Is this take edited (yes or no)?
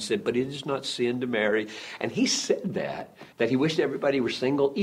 yes